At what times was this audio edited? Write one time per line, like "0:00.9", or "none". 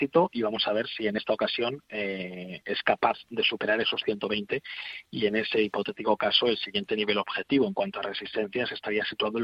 none